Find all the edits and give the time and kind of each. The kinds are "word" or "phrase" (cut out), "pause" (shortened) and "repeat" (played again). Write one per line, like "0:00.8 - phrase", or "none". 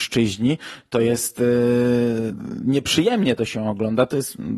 none